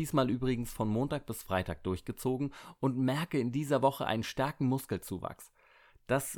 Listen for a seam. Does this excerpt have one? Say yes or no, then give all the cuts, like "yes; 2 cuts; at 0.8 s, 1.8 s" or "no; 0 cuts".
no; 0 cuts